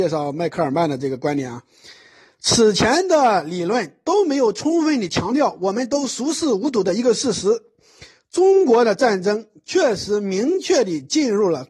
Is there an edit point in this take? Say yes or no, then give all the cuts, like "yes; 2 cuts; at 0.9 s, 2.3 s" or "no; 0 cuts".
no; 0 cuts